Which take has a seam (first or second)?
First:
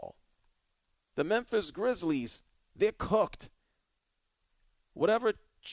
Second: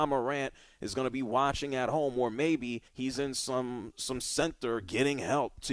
second